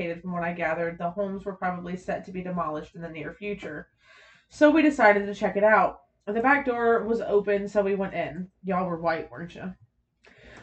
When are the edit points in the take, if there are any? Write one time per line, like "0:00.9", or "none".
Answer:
none